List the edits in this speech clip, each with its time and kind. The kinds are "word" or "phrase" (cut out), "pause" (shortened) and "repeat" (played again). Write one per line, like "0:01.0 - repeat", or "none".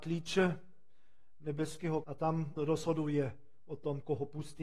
0:02.0 - word
0:02.6 - word